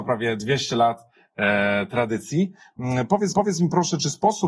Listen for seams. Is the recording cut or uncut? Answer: cut